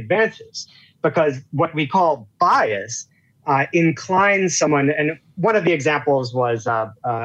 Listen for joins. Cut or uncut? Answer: uncut